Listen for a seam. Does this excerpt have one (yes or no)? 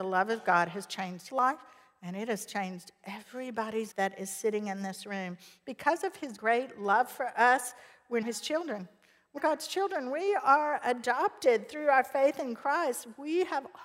yes